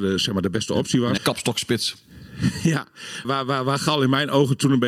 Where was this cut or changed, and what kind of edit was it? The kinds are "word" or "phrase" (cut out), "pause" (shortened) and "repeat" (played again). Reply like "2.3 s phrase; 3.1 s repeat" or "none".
1.2 s word; 3.2 s word